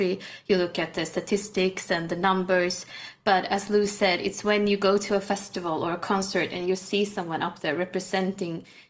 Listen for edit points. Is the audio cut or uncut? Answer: uncut